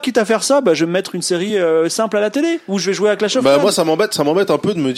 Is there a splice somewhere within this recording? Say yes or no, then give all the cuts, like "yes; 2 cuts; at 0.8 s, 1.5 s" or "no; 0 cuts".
no; 0 cuts